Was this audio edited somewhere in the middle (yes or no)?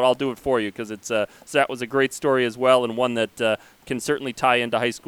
no